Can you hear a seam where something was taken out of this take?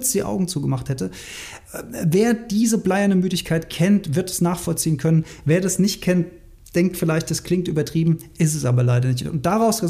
no; 0 cuts

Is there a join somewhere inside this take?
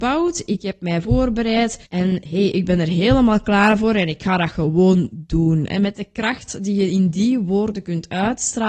yes; 1 cut; at 1.8 s

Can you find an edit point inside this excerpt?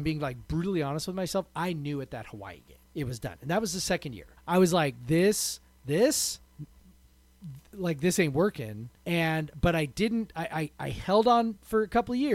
yes; 4 cuts; at 2.9 s, 4.4 s, 6.5 s, 9.0 s

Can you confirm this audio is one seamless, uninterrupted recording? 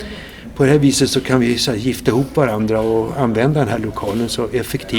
yes; 0 cuts

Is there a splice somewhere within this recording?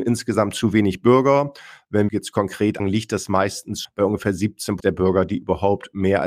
yes; 4 cuts; at 2.1 s, 2.8 s, 3.8 s, 4.8 s

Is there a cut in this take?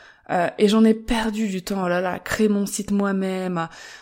no; 0 cuts

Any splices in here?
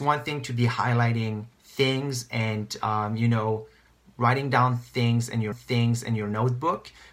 yes; 2 cuts; at 1.5 s, 5.5 s

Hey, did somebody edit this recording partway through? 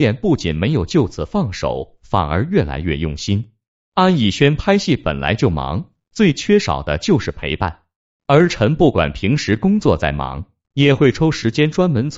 no; 0 cuts

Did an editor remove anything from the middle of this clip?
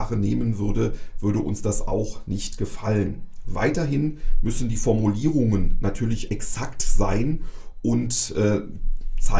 yes; 1 cut; at 6.3 s

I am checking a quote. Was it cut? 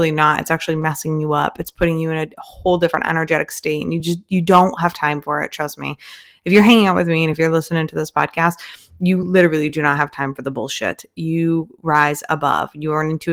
no; 0 cuts

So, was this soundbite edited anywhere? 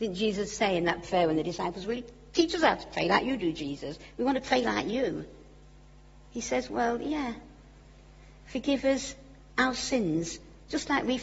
no; 0 cuts

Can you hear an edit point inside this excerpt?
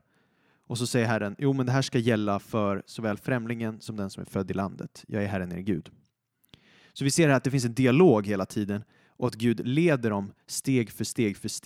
no; 0 cuts

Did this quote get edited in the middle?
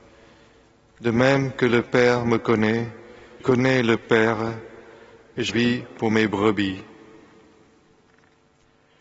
yes; 2 cuts; at 3.4 s, 5.5 s

